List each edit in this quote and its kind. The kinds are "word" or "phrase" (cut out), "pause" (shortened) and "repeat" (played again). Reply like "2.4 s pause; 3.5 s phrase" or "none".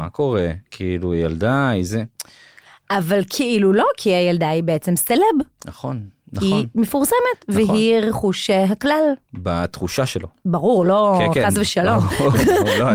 none